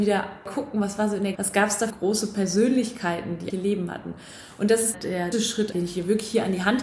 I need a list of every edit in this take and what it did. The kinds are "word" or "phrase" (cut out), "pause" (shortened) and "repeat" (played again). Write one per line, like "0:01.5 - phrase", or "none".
0:01.3 - word
0:01.9 - word
0:03.5 - word
0:05.3 - word
0:05.7 - word